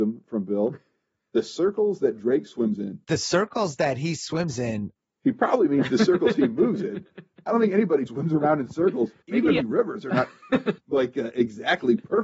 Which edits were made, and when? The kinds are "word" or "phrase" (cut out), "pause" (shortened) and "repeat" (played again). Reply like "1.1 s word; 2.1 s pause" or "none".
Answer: 3.0 s pause; 8.1 s word; 9.2 s pause; 9.6 s phrase